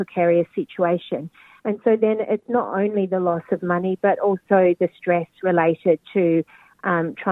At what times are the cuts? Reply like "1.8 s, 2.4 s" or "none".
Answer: 6.0 s